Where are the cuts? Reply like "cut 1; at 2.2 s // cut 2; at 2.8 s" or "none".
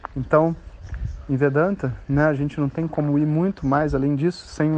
none

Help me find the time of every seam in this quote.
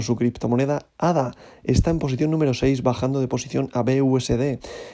none

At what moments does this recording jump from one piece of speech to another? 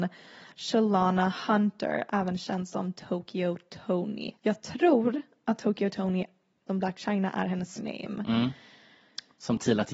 cut 1; at 4.4 s // cut 2; at 6.7 s // cut 3; at 7.8 s

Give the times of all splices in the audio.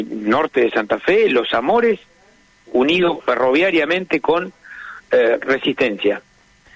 none

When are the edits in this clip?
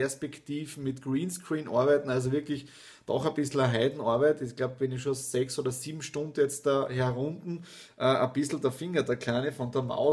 none

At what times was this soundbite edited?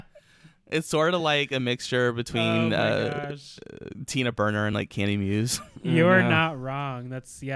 none

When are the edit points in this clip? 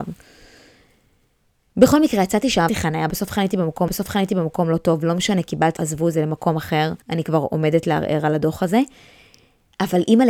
cut 1; at 2.7 s // cut 2; at 3.9 s // cut 3; at 5.8 s // cut 4; at 7.0 s

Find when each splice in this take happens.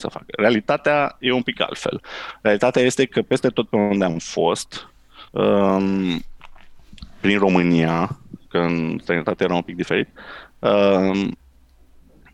cut 1; at 5.3 s

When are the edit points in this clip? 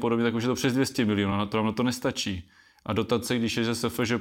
none

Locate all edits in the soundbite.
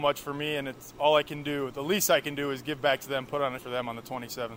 cut 1; at 3.6 s

